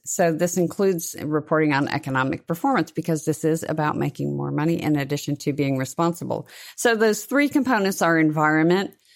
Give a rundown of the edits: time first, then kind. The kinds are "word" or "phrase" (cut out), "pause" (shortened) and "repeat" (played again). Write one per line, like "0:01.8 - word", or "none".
none